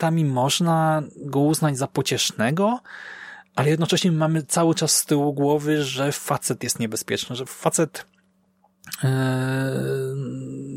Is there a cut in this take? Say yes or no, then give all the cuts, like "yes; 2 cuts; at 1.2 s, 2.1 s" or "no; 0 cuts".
no; 0 cuts